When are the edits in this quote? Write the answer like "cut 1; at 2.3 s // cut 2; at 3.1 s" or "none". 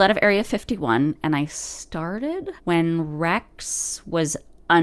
cut 1; at 2.6 s